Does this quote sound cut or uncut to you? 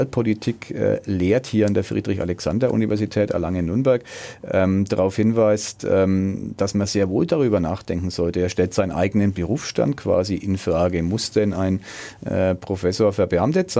uncut